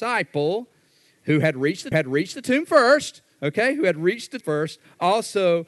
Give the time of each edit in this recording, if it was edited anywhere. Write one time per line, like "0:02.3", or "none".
0:01.9
0:04.4